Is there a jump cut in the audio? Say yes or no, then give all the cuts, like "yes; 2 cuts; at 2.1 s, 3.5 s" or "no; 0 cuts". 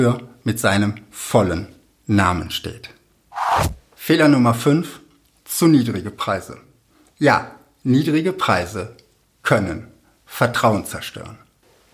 no; 0 cuts